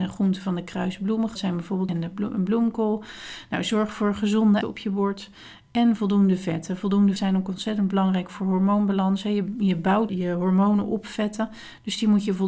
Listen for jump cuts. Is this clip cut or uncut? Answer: cut